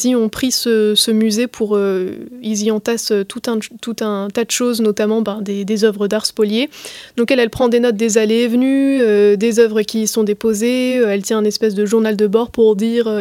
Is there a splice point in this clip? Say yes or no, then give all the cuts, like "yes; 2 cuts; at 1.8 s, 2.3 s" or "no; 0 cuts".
no; 0 cuts